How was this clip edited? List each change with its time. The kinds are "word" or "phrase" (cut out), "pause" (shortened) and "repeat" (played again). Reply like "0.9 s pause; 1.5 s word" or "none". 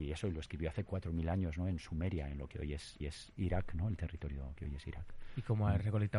3.0 s repeat